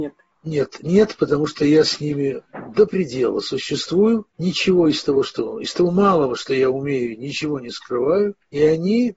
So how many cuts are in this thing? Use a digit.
0